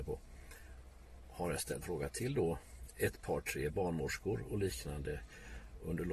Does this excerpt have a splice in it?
yes; 1 cut; at 1.8 s

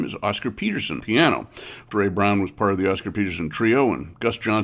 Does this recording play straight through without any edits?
no; 2 cuts; at 1.0 s, 1.9 s

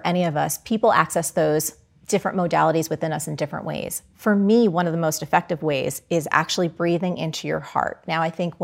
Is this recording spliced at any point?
no; 0 cuts

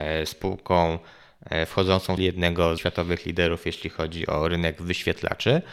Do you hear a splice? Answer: yes; 2 cuts; at 2.2 s, 2.8 s

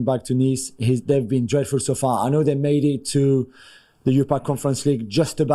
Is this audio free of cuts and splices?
yes; 0 cuts

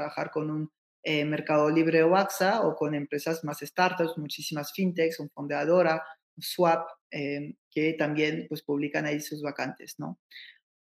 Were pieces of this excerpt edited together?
no; 0 cuts

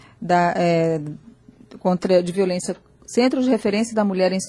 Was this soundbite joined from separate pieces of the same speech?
no; 0 cuts

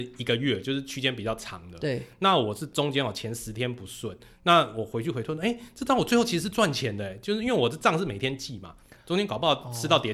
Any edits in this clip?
no; 0 cuts

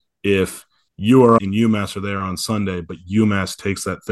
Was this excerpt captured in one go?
no; 1 cut; at 1.4 s

